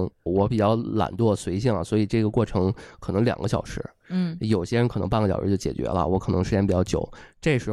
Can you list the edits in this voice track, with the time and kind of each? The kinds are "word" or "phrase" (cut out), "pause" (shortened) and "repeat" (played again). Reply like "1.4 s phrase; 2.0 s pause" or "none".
none